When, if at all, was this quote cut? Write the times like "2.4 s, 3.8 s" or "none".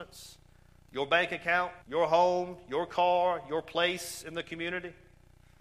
1.8 s